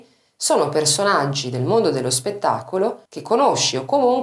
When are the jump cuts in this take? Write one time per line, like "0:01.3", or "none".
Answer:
0:03.1

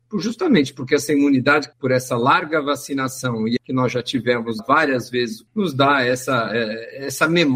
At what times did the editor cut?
0:01.7
0:03.6
0:04.6
0:05.5

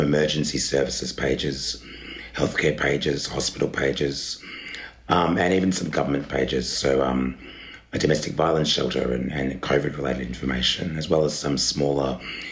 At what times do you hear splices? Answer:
none

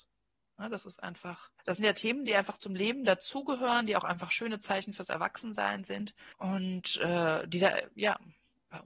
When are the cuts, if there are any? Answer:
0:01.6
0:06.3

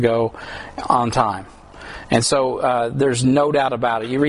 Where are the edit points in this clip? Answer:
none

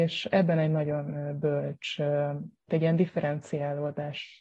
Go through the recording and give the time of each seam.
0:02.7

